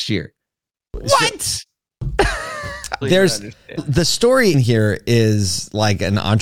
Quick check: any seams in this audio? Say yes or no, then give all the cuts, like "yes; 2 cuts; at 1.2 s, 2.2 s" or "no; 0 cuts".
yes; 3 cuts; at 3.0 s, 3.8 s, 4.5 s